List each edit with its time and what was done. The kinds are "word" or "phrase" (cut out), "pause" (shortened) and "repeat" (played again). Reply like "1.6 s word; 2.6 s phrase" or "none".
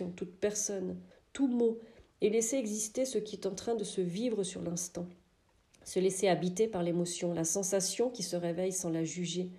1.1 s pause